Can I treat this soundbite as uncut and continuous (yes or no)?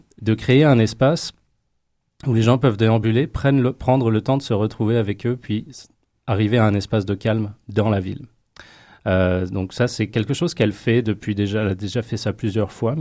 yes